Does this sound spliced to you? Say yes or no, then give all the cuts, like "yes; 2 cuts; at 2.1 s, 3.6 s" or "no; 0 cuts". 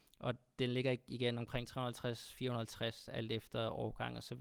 no; 0 cuts